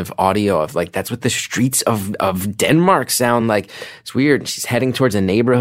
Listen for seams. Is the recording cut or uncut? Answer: uncut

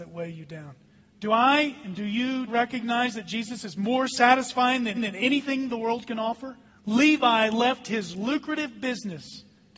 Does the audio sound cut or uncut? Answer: cut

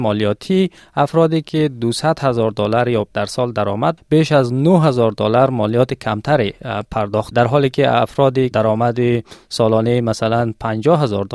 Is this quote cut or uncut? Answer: cut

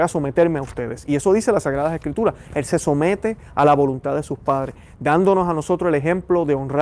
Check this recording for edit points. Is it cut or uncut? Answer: uncut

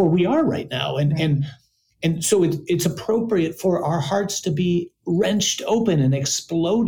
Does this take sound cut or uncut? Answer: uncut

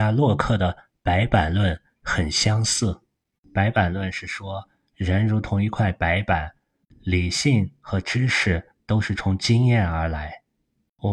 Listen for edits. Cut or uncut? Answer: uncut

